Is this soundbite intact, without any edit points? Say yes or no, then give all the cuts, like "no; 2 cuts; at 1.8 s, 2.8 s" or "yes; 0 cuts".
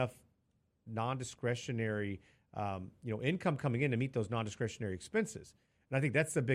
yes; 0 cuts